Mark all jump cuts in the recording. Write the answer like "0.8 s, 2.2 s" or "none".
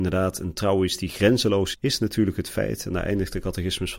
1.7 s